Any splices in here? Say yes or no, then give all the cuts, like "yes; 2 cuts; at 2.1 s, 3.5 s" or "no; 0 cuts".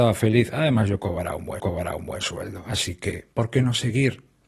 yes; 2 cuts; at 1.6 s, 3.3 s